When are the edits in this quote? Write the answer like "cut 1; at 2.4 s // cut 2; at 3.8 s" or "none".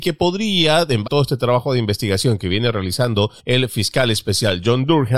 cut 1; at 1.0 s // cut 2; at 3.4 s